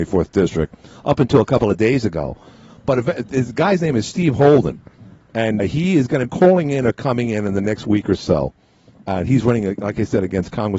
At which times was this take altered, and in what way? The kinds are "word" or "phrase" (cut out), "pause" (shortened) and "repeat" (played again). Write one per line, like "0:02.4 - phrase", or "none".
0:05.6 - word
0:06.3 - phrase